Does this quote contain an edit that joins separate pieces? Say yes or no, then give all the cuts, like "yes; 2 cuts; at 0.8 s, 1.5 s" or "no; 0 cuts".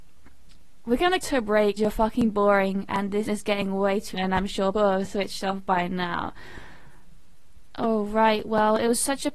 yes; 5 cuts; at 1.2 s, 1.8 s, 3.3 s, 4.1 s, 4.7 s